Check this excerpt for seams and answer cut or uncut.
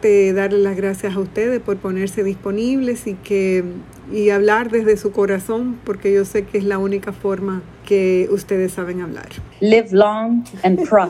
cut